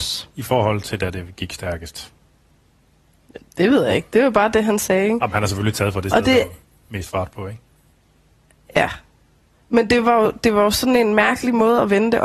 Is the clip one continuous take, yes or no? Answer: yes